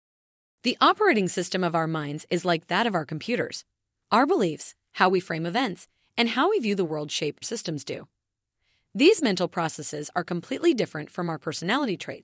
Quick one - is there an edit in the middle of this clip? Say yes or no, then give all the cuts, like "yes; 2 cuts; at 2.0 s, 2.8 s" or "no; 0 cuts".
yes; 1 cut; at 7.4 s